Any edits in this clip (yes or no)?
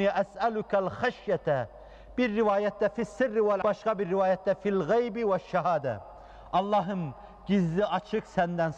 yes